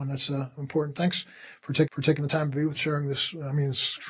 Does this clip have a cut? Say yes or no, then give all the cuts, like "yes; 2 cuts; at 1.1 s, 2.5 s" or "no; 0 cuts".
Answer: yes; 2 cuts; at 1.9 s, 2.8 s